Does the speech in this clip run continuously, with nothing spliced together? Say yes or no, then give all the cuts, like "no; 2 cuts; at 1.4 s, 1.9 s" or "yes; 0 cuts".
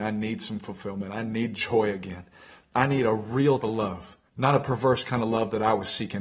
no; 2 cuts; at 3.6 s, 4.3 s